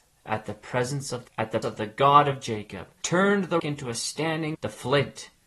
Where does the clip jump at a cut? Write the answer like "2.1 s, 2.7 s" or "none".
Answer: 1.3 s, 1.6 s, 3.0 s, 3.6 s, 4.5 s